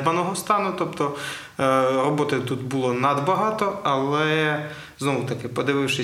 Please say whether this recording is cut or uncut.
uncut